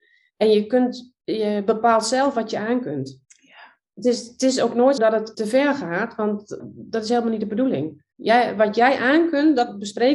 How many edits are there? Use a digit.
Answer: 6